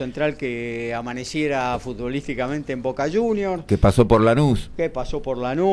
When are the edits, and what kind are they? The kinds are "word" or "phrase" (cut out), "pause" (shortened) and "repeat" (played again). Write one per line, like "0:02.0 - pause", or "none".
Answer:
none

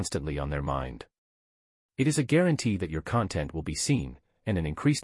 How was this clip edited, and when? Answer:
none

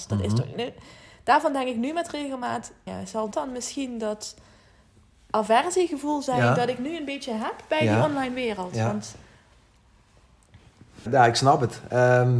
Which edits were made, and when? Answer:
0:02.9 - word
0:03.3 - word
0:11.1 - word

